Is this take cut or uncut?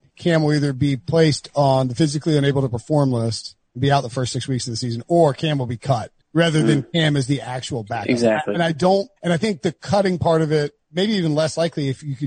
cut